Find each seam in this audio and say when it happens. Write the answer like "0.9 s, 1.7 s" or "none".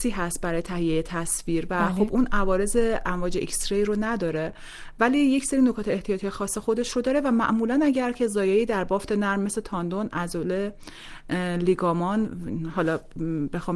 none

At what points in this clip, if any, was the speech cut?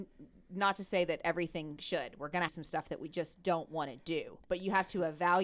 2.5 s

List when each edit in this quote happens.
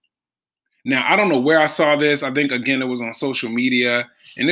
none

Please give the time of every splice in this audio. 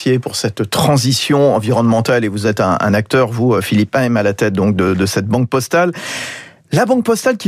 none

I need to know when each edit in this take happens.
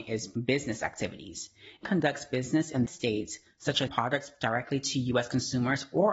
1.8 s, 2.8 s, 3.9 s

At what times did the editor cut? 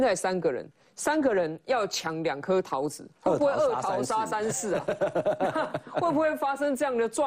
none

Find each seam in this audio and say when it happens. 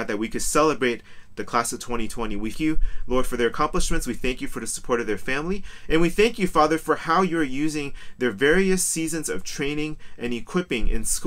2.5 s

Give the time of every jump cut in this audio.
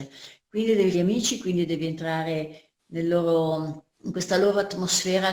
0.9 s, 3.9 s

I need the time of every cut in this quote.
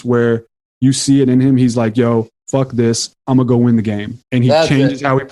2.4 s, 3.2 s, 4.2 s

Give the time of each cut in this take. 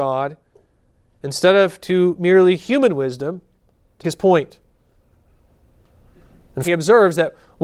4.0 s, 6.6 s

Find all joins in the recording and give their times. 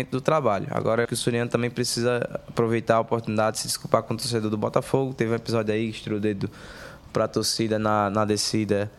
1.0 s

